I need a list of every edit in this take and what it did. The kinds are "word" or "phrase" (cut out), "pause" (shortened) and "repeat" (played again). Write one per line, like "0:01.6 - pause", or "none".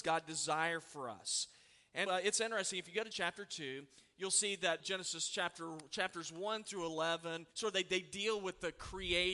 0:02.1 - word
0:03.1 - word
0:04.8 - word
0:07.5 - pause